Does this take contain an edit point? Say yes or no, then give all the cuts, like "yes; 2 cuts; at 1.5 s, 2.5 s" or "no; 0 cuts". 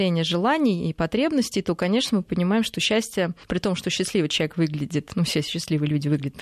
yes; 1 cut; at 3.4 s